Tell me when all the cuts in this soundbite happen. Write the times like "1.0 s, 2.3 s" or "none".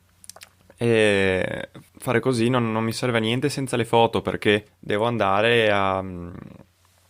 1.9 s, 4.7 s